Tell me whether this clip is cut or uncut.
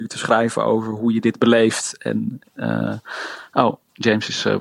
uncut